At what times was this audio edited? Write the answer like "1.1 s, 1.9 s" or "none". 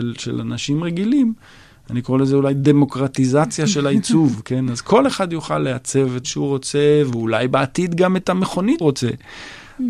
6.2 s, 8.8 s